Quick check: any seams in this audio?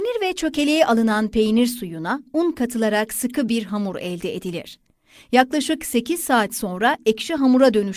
no; 0 cuts

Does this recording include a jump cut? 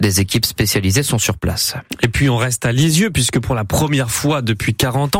no; 0 cuts

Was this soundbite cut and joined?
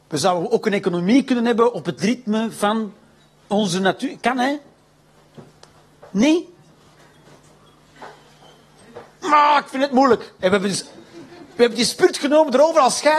no; 0 cuts

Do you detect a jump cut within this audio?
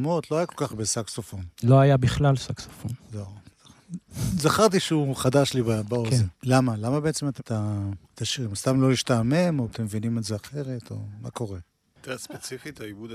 yes; 4 cuts; at 6.3 s, 7.4 s, 8.0 s, 9.7 s

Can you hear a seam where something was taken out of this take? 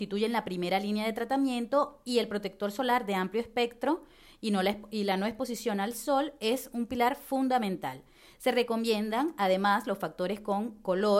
no; 0 cuts

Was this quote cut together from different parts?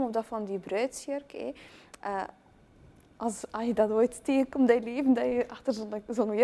no; 0 cuts

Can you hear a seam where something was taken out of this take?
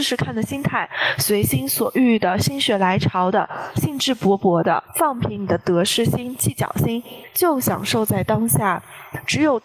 yes; 1 cut; at 4.9 s

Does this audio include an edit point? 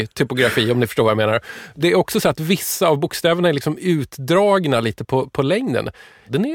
no; 0 cuts

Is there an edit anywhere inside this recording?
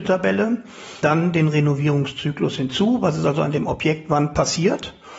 no; 0 cuts

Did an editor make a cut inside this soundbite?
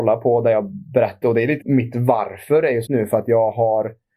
yes; 3 cuts; at 1.2 s, 1.6 s, 2.9 s

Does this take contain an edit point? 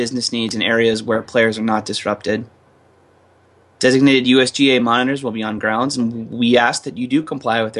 no; 0 cuts

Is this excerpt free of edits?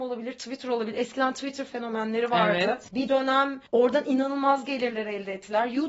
no; 2 cuts; at 2.9 s, 3.7 s

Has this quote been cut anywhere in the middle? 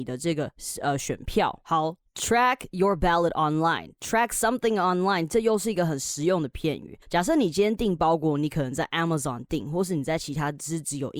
yes; 1 cut; at 7.0 s

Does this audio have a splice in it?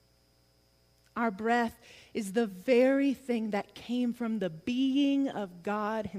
no; 0 cuts

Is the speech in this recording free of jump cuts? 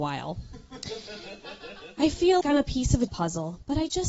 no; 2 cuts; at 2.4 s, 3.1 s

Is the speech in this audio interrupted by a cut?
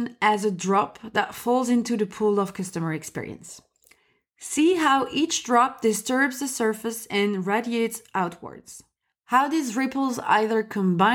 no; 0 cuts

